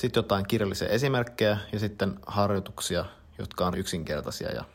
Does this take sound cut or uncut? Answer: cut